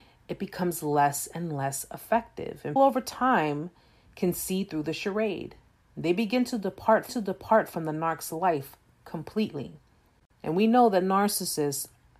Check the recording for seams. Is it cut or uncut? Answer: cut